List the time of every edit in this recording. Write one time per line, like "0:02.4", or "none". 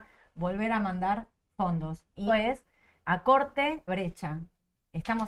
0:02.3
0:03.0
0:03.9